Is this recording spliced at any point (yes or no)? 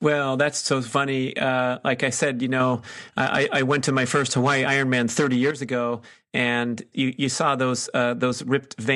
yes